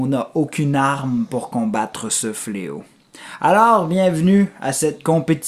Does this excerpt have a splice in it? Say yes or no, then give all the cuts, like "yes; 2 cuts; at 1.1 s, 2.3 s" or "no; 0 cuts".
no; 0 cuts